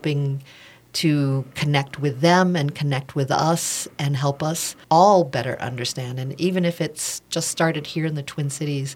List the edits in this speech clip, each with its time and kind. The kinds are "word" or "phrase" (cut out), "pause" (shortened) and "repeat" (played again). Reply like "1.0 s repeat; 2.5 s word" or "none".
4.8 s pause